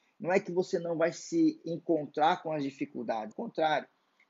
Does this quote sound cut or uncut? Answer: cut